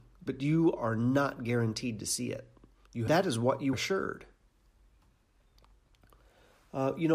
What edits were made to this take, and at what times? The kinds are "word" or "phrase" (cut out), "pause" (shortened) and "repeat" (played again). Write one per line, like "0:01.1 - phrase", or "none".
0:03.1 - phrase
0:03.7 - word